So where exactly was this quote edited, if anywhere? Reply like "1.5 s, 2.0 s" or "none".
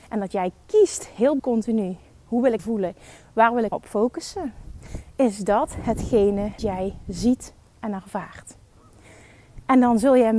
1.4 s, 2.6 s, 3.7 s, 6.6 s